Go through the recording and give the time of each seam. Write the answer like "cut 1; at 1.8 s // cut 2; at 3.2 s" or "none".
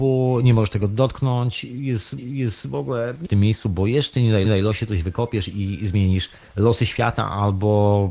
cut 1; at 2.2 s // cut 2; at 3.2 s // cut 3; at 4.4 s // cut 4; at 6.4 s